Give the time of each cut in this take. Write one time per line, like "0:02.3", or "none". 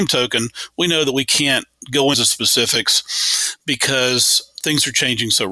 0:02.1